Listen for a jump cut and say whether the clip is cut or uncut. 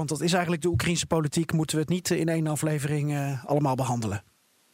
uncut